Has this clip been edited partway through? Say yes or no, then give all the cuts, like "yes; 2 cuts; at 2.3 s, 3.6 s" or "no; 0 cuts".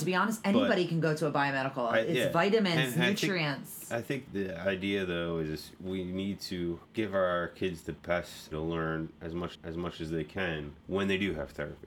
yes; 5 cuts; at 4.3 s, 6.8 s, 8.5 s, 9.5 s, 10.8 s